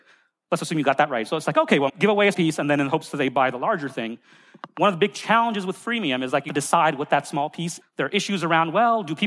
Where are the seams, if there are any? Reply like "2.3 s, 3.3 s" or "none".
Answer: 1.9 s, 2.3 s, 6.5 s, 7.8 s